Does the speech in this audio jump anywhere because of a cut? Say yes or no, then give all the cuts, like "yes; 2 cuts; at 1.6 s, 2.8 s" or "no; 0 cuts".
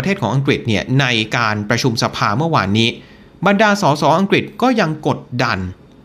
no; 0 cuts